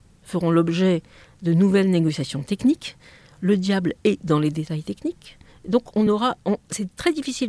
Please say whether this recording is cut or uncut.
uncut